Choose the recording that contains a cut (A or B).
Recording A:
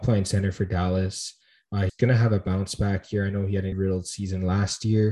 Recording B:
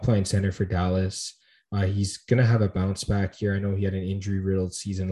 A